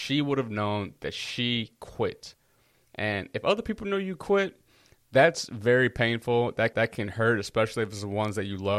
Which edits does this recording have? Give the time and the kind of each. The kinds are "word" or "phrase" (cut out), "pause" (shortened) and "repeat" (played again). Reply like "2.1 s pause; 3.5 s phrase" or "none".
6.7 s repeat

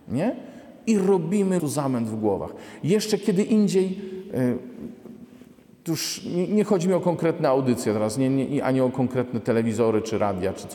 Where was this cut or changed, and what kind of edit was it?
1.6 s phrase

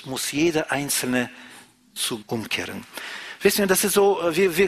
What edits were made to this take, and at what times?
2.2 s phrase

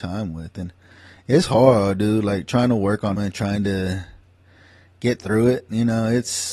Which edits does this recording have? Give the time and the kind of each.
3.2 s word

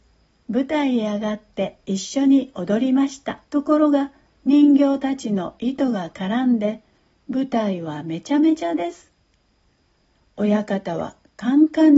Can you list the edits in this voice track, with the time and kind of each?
3.4 s pause

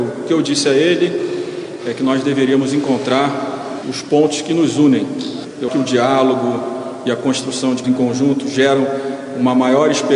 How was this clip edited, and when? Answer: 3.8 s word; 5.7 s word; 7.8 s word

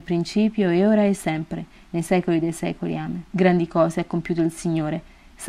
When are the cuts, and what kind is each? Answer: 3.3 s pause

